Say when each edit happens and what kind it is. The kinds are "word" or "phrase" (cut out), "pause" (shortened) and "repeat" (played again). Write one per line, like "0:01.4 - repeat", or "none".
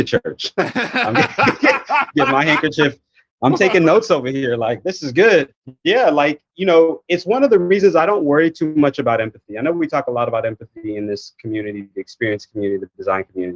none